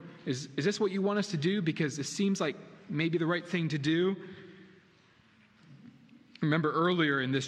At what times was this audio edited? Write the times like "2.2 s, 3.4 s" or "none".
none